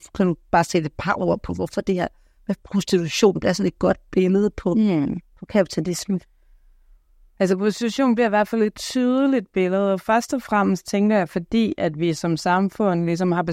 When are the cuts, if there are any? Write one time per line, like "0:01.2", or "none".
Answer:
none